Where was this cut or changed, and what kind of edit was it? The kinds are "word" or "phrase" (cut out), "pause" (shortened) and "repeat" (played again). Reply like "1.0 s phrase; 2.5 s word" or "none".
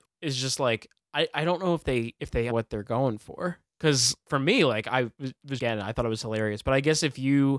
2.5 s word; 5.6 s word